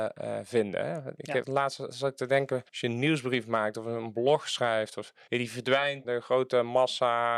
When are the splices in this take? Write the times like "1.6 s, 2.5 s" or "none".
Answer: 1.4 s, 2.7 s, 5.3 s, 6.0 s